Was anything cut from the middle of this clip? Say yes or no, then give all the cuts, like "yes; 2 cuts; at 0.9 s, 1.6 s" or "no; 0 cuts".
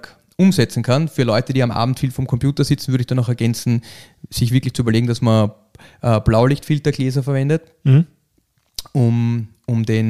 no; 0 cuts